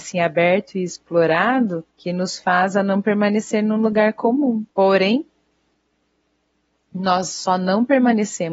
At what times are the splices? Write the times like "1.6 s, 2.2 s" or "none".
1.9 s, 4.7 s